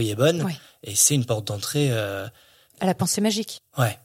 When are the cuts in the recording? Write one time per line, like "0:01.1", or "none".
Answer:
none